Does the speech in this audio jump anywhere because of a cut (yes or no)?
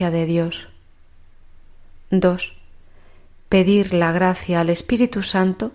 no